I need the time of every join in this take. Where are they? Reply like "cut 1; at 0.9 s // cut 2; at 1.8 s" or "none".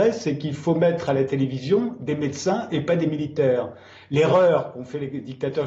none